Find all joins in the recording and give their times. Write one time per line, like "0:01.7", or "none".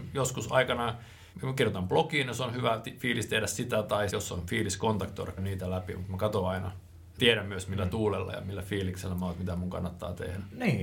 0:01.3
0:04.1
0:05.4
0:07.2